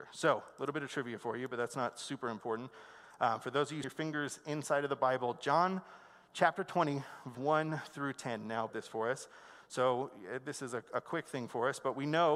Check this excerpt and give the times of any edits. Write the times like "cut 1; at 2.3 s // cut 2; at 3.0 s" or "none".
cut 1; at 3.8 s // cut 2; at 7.3 s // cut 3; at 8.7 s